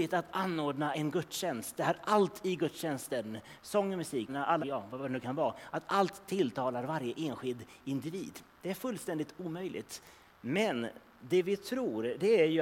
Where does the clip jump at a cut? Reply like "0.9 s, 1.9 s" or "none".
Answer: 0.9 s, 4.3 s, 4.6 s